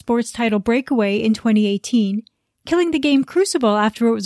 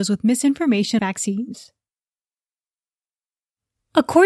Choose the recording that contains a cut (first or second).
second